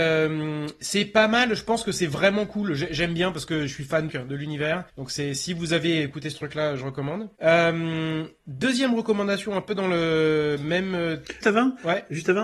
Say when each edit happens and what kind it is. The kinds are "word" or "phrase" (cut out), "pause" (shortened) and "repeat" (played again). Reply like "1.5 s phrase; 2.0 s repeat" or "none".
4.1 s phrase; 4.9 s pause; 7.3 s pause; 11.4 s word